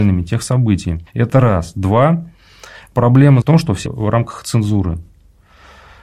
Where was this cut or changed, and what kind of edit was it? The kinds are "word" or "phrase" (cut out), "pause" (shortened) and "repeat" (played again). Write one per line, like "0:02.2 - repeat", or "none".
0:01.1 - pause
0:03.4 - word
0:03.9 - phrase